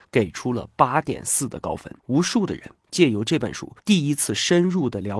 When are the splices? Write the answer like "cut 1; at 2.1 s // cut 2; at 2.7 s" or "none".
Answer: cut 1; at 2.0 s // cut 2; at 3.8 s